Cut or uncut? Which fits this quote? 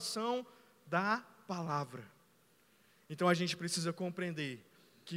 uncut